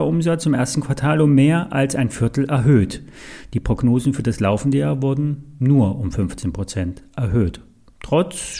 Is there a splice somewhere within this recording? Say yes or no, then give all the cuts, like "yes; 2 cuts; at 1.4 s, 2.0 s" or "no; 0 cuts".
no; 0 cuts